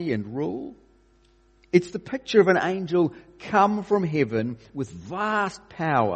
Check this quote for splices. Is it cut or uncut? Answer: uncut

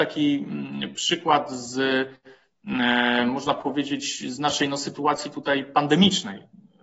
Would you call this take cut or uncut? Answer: uncut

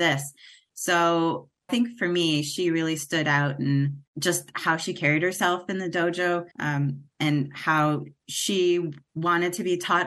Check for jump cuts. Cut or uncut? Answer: cut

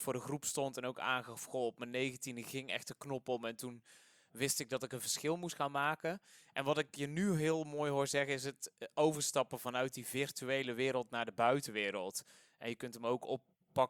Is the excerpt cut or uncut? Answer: uncut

